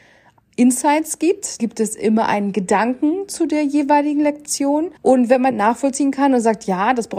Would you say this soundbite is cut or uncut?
cut